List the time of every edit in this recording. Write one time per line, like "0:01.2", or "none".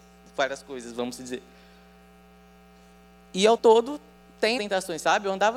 0:03.6
0:04.6